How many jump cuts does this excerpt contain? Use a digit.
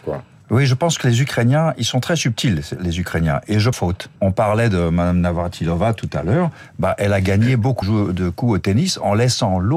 3